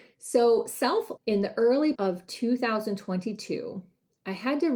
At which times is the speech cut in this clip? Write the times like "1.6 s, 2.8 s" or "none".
1.2 s, 1.9 s